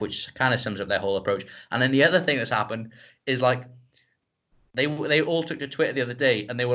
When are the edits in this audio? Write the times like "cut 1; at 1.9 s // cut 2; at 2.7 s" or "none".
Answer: none